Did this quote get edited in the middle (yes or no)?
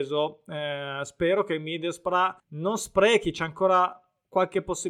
yes